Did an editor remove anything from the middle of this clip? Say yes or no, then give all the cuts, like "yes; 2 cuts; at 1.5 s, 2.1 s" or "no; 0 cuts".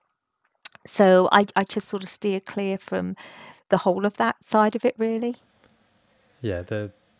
yes; 1 cut; at 3.6 s